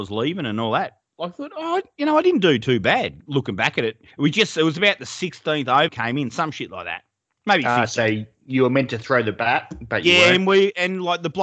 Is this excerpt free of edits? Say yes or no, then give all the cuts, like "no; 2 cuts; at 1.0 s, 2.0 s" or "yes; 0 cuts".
no; 2 cuts; at 4.1 s, 5.9 s